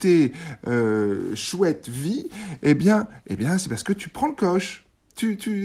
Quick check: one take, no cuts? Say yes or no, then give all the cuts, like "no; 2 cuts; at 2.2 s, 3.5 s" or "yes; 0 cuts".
yes; 0 cuts